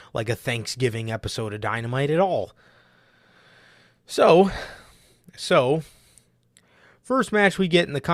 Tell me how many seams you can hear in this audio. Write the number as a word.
zero